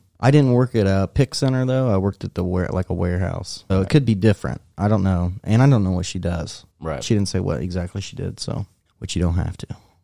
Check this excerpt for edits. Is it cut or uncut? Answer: cut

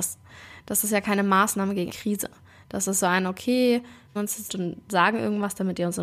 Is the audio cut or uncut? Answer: cut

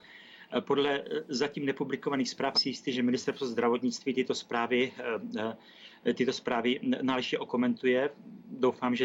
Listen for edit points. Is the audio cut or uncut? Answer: cut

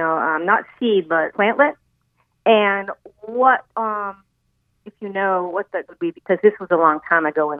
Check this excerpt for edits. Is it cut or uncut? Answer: cut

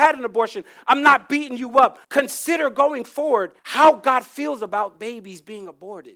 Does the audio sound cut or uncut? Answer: cut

